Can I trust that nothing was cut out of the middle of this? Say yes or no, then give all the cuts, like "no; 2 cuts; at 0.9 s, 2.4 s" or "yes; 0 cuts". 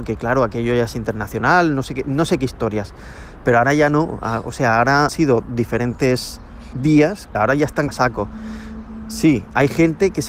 no; 4 cuts; at 5.1 s, 6.7 s, 7.3 s, 7.9 s